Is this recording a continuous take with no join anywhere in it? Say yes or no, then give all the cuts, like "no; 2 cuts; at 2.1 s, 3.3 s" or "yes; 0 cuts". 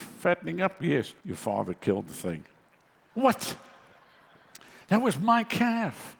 no; 1 cut; at 1.2 s